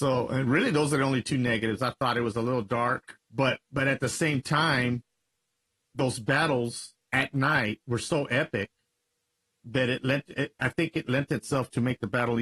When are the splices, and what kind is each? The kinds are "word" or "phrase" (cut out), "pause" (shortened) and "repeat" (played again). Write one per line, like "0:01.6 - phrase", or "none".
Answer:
0:03.2 - pause
0:07.8 - pause